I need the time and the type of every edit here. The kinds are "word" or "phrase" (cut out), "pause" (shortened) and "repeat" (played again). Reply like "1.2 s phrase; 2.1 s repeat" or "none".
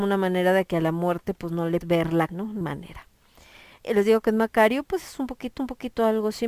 1.8 s word; 2.3 s word; 2.6 s word; 3.8 s word; 5.6 s repeat